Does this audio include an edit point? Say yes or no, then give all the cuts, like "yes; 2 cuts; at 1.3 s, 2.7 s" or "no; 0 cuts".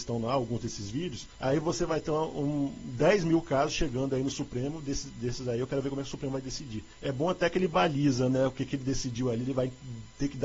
yes; 2 cuts; at 1.3 s, 6.9 s